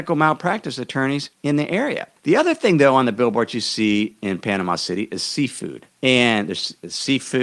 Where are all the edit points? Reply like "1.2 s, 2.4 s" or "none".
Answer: 1.3 s, 2.2 s, 5.9 s